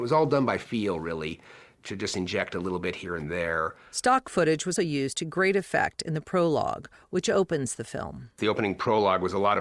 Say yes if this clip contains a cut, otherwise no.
yes